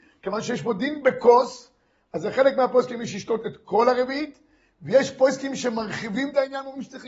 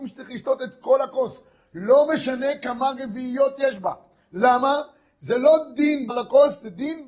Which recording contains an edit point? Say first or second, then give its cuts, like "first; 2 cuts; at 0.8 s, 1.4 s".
second; 1 cut; at 6.1 s